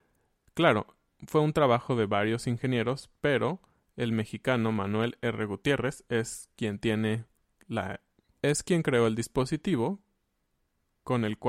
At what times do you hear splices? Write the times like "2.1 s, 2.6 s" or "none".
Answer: none